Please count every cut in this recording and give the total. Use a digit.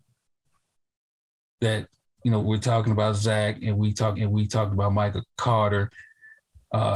2